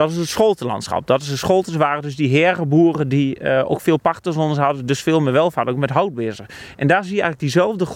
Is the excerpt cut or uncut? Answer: uncut